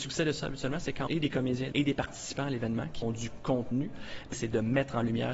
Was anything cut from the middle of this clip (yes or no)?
yes